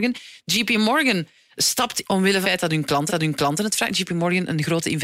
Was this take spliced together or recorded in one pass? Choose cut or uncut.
cut